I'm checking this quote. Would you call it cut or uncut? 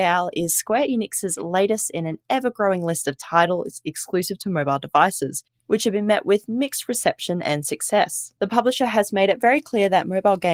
uncut